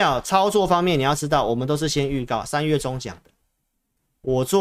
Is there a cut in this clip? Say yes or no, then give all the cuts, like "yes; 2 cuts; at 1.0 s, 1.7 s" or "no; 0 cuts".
no; 0 cuts